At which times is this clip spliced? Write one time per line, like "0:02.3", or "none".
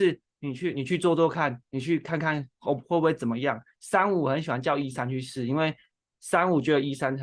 none